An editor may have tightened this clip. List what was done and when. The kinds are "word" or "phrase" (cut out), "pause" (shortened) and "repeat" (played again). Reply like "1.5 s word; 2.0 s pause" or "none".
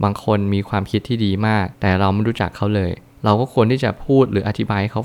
1.7 s pause